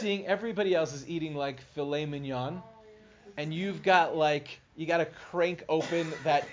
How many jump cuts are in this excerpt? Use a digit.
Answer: 1